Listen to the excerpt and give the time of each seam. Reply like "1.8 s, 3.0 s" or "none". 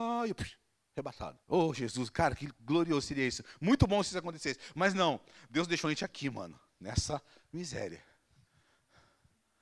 1.4 s